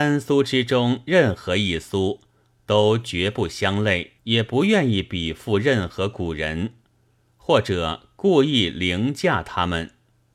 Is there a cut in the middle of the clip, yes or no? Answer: yes